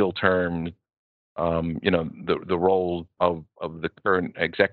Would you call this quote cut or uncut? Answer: cut